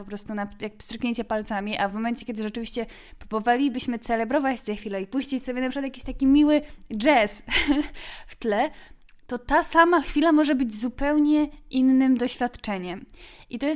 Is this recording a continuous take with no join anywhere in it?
yes; 0 cuts

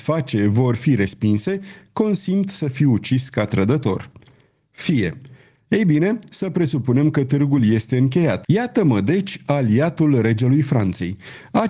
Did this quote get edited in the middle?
no; 0 cuts

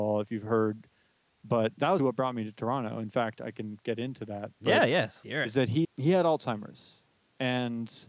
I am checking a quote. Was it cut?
yes; 3 cuts; at 2.0 s, 5.2 s, 5.8 s

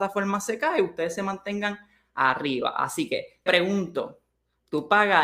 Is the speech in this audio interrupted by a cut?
yes; 1 cut; at 3.5 s

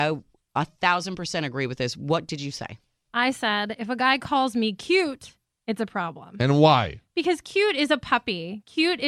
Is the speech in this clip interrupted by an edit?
no; 0 cuts

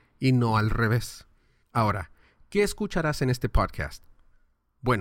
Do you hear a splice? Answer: no; 0 cuts

